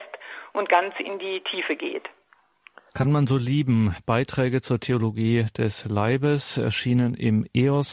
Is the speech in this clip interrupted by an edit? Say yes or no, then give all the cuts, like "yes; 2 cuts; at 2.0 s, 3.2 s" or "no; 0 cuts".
no; 0 cuts